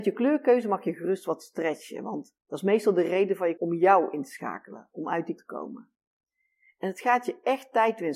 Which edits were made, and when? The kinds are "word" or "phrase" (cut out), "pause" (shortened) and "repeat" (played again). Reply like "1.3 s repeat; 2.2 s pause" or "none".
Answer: 2.4 s pause; 3.6 s word; 5.4 s word